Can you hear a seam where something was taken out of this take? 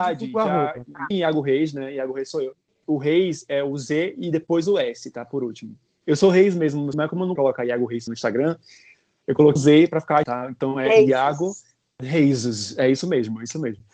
yes; 6 cuts; at 1.1 s, 6.9 s, 7.4 s, 8.1 s, 9.6 s, 10.2 s

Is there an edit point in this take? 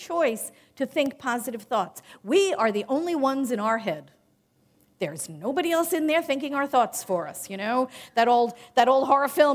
no; 0 cuts

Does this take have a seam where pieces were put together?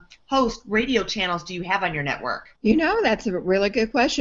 yes; 1 cut; at 2.6 s

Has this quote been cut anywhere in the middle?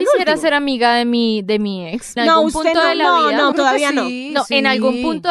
yes; 2 cuts; at 2.2 s, 3.5 s

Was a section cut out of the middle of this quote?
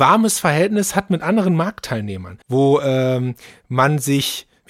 yes; 1 cut; at 2.4 s

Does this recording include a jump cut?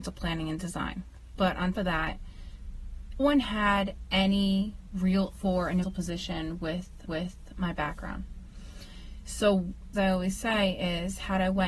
yes; 6 cuts; at 1.7 s, 3.2 s, 5.3 s, 5.8 s, 7.1 s, 9.9 s

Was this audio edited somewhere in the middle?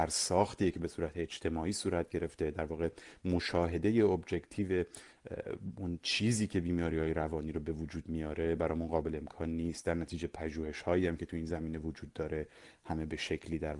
no; 0 cuts

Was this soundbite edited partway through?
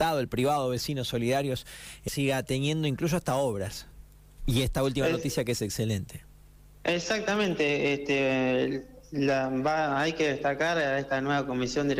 yes; 1 cut; at 2.1 s

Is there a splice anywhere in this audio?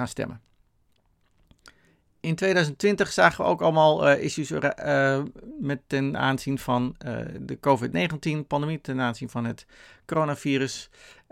no; 0 cuts

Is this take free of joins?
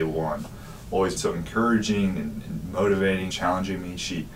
no; 2 cuts; at 1.2 s, 3.3 s

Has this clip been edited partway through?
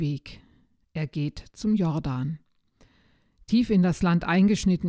no; 0 cuts

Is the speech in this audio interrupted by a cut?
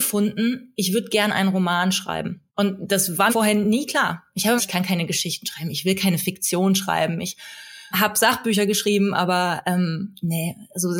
yes; 4 cuts; at 2.5 s, 3.3 s, 4.6 s, 7.9 s

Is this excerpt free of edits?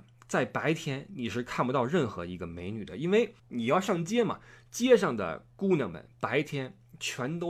no; 1 cut; at 3.4 s

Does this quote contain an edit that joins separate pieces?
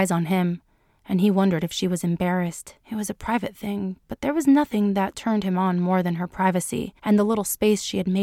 yes; 2 cuts; at 2.8 s, 7.0 s

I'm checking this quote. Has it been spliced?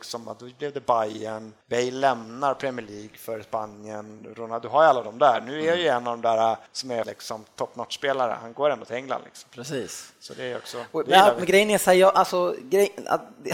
yes; 3 cuts; at 1.6 s, 6.7 s, 7.0 s

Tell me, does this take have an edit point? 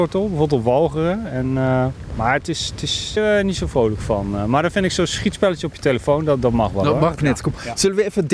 yes; 2 cuts; at 3.2 s, 7.2 s

